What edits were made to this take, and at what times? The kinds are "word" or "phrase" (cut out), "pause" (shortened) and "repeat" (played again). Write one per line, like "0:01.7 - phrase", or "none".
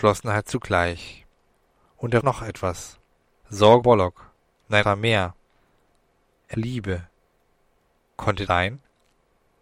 0:02.2 - word
0:03.8 - word
0:04.8 - word
0:06.5 - word
0:08.5 - word